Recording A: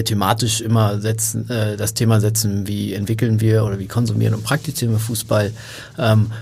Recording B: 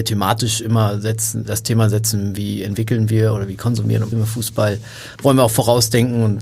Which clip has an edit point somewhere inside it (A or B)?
B